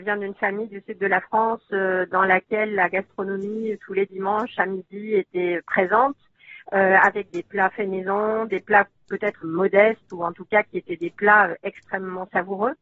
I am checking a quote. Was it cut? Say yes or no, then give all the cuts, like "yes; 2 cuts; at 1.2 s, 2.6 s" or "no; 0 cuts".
yes; 1 cut; at 9.4 s